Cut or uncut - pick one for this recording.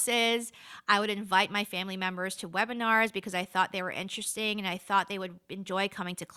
uncut